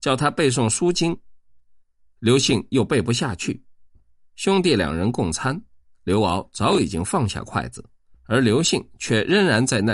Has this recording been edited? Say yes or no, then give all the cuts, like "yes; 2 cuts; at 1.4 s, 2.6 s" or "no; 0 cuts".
no; 0 cuts